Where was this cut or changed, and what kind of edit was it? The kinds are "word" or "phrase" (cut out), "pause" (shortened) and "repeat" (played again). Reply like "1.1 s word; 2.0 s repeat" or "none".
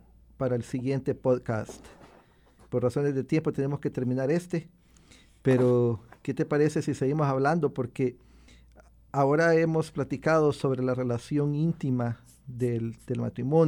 none